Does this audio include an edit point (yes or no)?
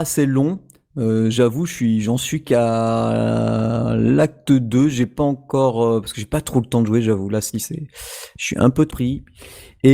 yes